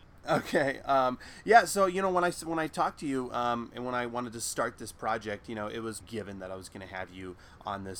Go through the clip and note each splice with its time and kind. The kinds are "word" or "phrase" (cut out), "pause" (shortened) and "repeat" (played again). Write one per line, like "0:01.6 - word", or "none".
0:06.0 - phrase